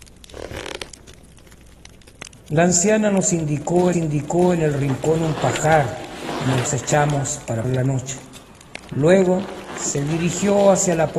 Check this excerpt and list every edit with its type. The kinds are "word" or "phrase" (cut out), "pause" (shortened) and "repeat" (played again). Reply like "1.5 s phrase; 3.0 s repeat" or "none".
3.9 s repeat; 6.7 s phrase; 7.6 s word